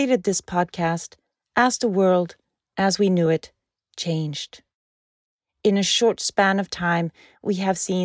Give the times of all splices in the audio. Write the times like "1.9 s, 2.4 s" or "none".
none